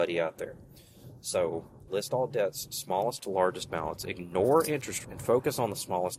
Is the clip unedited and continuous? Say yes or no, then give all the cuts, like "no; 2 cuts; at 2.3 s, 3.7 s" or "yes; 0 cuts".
no; 3 cuts; at 1.9 s, 3.2 s, 5.0 s